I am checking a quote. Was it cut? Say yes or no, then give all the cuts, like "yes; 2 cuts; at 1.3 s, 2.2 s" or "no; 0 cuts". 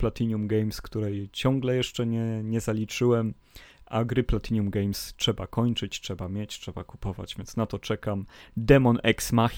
no; 0 cuts